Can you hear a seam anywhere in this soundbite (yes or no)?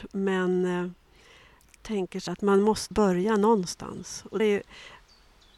yes